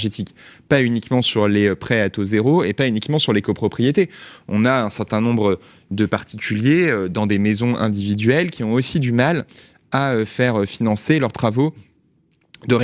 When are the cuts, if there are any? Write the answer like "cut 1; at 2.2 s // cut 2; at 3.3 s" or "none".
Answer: none